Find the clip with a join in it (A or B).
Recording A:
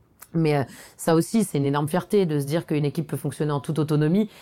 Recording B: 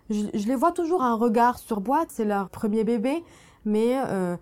B